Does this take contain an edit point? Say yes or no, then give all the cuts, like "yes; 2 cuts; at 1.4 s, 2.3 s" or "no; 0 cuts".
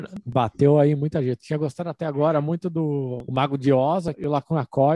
no; 0 cuts